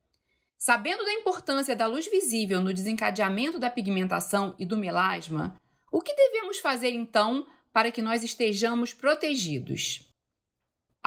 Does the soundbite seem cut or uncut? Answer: uncut